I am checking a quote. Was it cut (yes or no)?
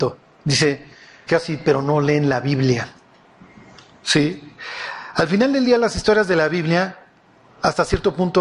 yes